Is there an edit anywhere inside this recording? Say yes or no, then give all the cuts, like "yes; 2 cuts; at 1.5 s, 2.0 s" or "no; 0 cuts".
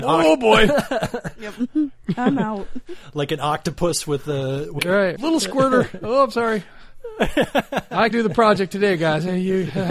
yes; 3 cuts; at 4.8 s, 5.2 s, 8.1 s